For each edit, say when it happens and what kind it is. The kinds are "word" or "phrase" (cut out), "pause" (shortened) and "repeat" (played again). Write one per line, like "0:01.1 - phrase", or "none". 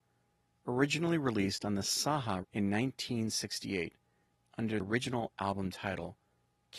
0:02.4 - phrase
0:04.8 - word